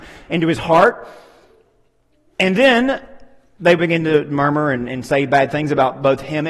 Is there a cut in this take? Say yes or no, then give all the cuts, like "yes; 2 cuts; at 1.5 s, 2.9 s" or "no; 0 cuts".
no; 0 cuts